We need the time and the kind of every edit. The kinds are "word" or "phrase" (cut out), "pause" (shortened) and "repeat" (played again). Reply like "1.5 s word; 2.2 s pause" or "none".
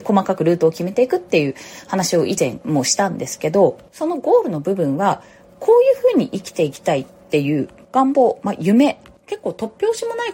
none